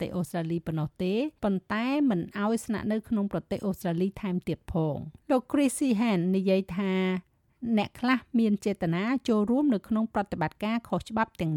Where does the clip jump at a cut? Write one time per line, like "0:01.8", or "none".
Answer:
0:01.4
0:05.2